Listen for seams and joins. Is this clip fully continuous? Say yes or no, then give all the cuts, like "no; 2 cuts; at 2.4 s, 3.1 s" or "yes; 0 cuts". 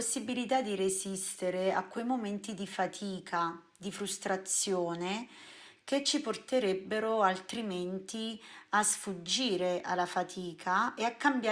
yes; 0 cuts